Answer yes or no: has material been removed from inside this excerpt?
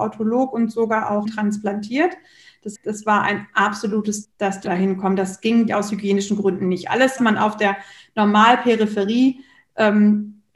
yes